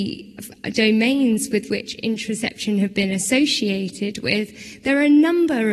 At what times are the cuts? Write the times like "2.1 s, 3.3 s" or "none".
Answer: none